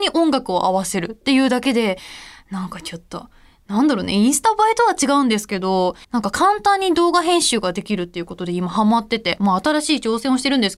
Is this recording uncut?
no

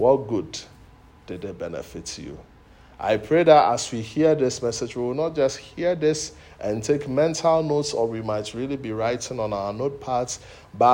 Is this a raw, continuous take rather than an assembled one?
yes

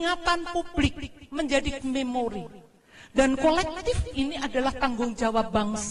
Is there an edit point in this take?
yes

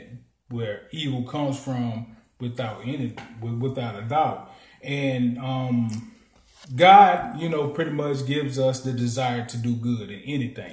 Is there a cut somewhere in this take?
no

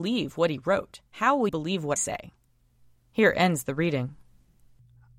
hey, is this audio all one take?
no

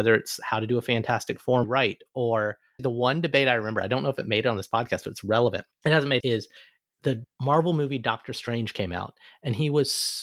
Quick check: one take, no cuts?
no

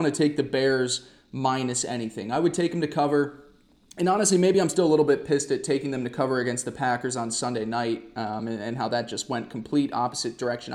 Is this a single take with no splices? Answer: yes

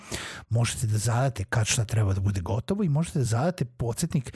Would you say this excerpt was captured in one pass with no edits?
yes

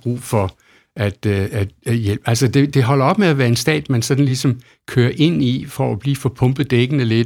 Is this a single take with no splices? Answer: yes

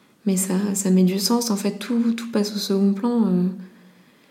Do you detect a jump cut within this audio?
no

